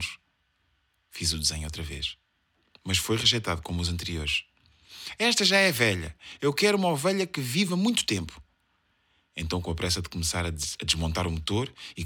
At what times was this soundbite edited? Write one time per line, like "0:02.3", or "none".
none